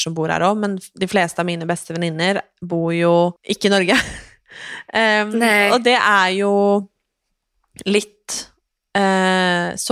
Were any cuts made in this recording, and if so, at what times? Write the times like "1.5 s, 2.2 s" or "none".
3.4 s